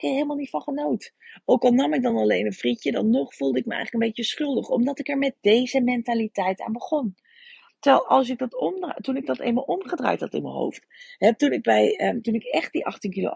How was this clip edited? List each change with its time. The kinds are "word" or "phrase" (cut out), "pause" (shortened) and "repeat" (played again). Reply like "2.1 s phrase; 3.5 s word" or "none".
none